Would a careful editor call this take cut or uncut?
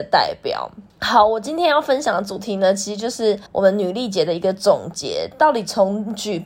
cut